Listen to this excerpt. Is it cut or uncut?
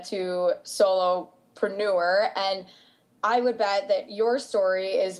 uncut